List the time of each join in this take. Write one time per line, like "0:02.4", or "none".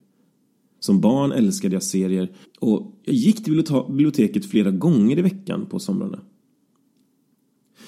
0:02.4